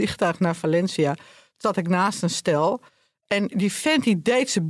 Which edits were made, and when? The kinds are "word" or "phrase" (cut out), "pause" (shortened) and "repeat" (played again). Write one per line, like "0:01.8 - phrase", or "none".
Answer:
none